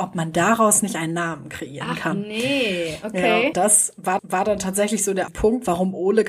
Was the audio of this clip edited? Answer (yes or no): yes